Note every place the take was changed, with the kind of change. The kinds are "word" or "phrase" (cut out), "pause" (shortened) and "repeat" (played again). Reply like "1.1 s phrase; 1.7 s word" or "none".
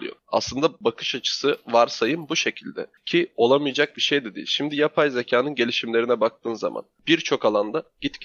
none